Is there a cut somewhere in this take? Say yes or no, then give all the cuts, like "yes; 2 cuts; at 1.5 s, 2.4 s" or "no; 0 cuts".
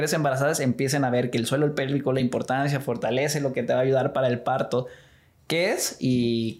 no; 0 cuts